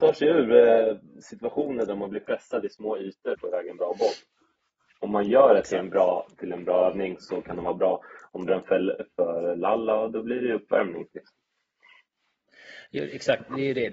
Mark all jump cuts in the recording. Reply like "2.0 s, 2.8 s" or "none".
3.3 s, 8.5 s